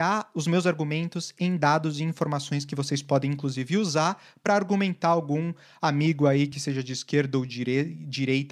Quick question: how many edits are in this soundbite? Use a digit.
0